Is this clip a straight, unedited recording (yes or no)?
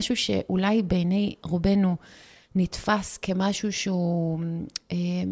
yes